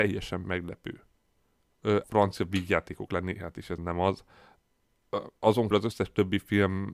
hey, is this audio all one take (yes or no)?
no